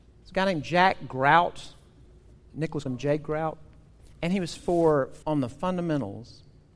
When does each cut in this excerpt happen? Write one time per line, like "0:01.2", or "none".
0:02.9
0:04.1
0:04.5
0:05.2

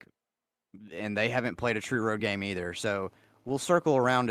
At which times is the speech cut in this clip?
none

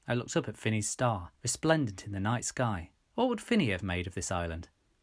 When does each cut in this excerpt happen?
0:01.4
0:03.0

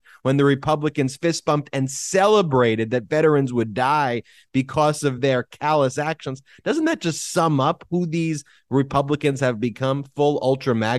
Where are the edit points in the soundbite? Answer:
none

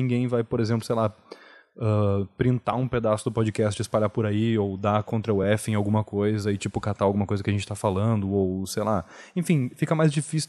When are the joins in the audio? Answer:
none

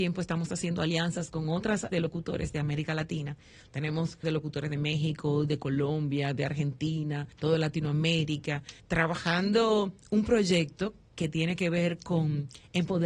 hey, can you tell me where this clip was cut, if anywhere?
0:01.9
0:04.2
0:07.3
0:08.8

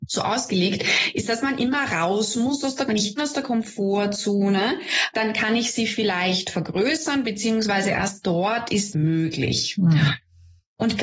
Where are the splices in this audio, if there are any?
0:02.9
0:03.2
0:05.1
0:08.9

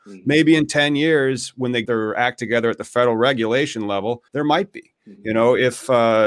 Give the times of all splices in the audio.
0:01.8
0:04.3

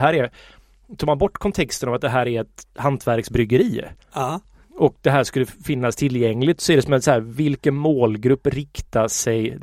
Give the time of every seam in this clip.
0:04.0

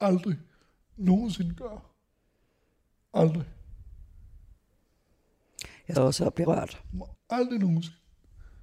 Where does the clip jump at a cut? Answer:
0:06.0
0:06.5
0:07.1

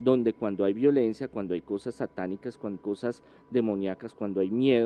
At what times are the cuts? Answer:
0:02.8

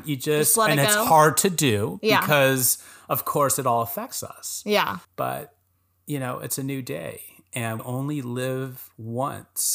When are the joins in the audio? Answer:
0:05.0
0:07.8

